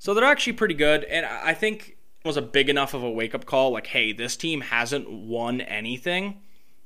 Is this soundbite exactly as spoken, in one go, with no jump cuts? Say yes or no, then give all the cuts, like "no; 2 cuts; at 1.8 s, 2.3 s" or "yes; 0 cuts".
no; 1 cut; at 2.2 s